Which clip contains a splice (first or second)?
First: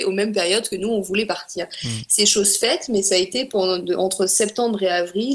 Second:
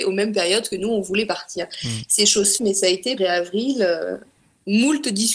second